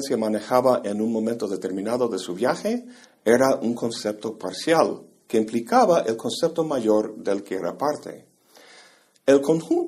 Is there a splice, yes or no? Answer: no